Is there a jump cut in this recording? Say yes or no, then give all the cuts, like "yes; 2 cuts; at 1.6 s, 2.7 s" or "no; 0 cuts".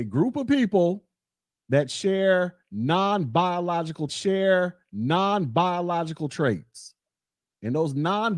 yes; 2 cuts; at 1.4 s, 4.1 s